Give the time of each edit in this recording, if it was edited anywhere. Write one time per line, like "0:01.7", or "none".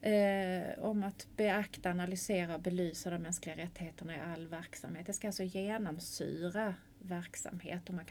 0:06.9